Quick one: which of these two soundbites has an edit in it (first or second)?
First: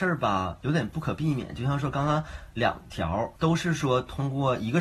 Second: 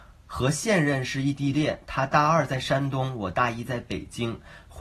first